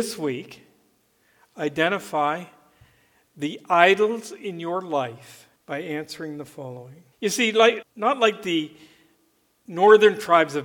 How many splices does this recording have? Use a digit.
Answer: 3